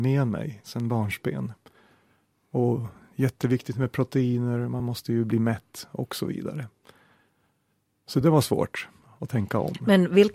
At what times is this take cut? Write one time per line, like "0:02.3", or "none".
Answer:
none